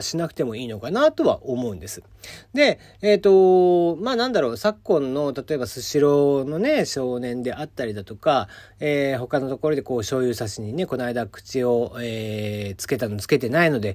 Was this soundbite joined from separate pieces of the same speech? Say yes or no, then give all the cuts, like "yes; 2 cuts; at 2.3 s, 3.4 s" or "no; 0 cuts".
no; 0 cuts